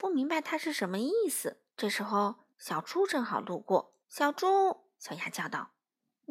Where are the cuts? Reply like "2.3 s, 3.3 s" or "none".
1.7 s, 2.5 s, 4.0 s